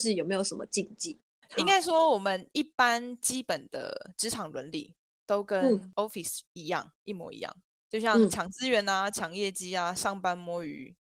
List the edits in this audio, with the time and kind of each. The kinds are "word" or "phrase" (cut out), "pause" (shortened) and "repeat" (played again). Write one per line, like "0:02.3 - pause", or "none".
none